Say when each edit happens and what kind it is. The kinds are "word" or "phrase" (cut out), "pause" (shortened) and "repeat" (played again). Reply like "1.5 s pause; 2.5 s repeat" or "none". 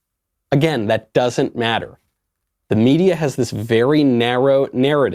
none